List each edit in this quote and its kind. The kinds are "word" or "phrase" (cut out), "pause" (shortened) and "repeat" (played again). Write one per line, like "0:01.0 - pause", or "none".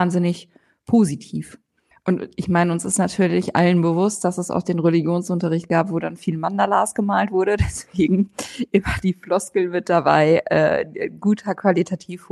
0:01.9 - pause